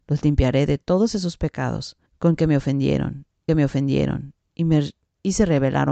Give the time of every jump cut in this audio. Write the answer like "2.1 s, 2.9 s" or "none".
2.1 s, 3.5 s

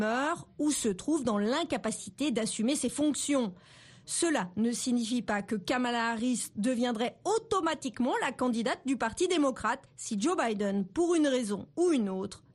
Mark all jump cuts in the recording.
9.9 s

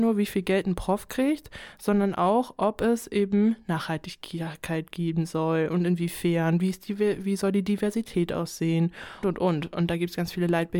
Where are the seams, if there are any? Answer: 9.2 s

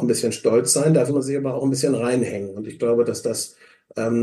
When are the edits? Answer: 1.1 s

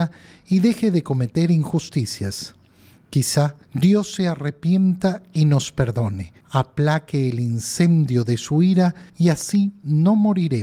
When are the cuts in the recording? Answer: 3.6 s, 6.4 s, 9.1 s

